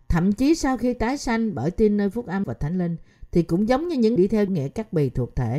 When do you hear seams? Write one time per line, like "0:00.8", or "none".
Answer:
0:02.4
0:04.2
0:04.5